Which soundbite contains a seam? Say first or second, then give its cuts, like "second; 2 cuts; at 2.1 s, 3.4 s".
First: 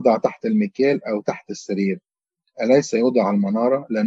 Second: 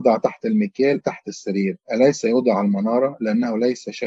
second; 2 cuts; at 1.0 s, 1.8 s